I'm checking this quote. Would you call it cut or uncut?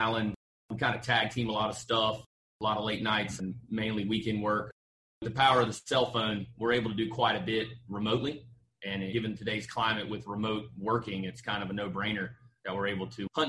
uncut